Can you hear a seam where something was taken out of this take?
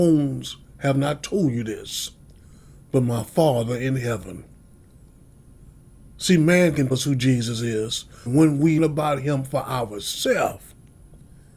yes; 3 cuts; at 6.9 s, 8.3 s, 8.8 s

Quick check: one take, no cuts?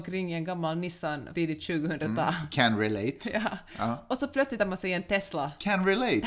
no; 2 cuts; at 1.3 s, 4.6 s

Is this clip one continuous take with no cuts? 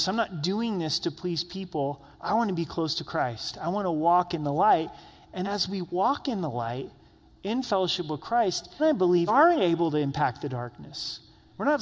no; 4 cuts; at 2.1 s, 5.4 s, 8.8 s, 9.3 s

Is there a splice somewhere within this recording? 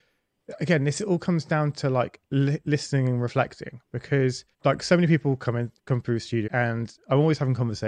yes; 3 cuts; at 4.5 s, 5.8 s, 6.5 s

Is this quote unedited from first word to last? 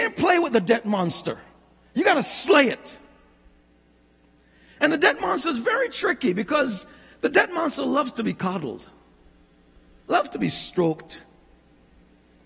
yes; 0 cuts

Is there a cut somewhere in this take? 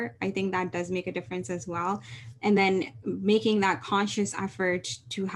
no; 0 cuts

